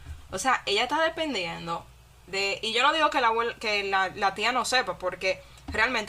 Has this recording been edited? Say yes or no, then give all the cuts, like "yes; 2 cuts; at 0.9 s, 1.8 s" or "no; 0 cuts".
no; 0 cuts